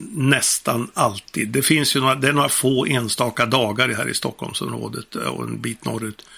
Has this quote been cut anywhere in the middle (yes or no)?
no